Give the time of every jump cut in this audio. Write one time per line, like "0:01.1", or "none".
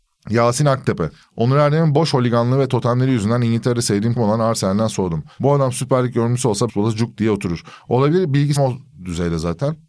0:04.2
0:06.7
0:08.6